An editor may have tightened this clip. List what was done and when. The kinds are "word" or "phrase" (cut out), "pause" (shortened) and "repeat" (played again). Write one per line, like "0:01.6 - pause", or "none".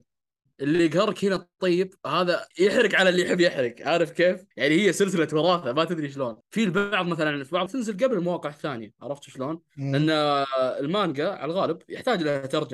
0:02.5 - pause
0:04.5 - pause
0:06.4 - pause
0:07.7 - phrase